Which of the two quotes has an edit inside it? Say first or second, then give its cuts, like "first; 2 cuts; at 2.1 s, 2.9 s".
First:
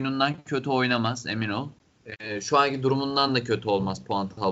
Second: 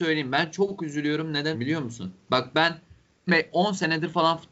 second; 3 cuts; at 1.5 s, 2.2 s, 3.3 s